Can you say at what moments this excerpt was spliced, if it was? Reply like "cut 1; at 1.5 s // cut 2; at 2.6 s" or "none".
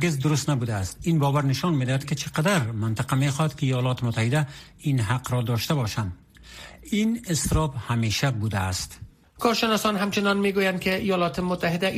none